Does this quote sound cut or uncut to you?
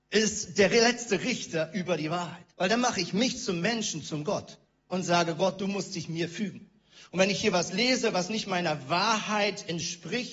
cut